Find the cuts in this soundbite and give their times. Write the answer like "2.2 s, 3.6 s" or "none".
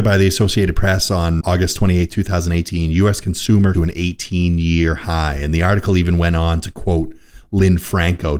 1.4 s, 3.7 s